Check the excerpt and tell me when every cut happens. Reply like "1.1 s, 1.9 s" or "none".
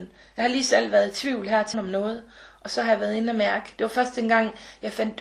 1.7 s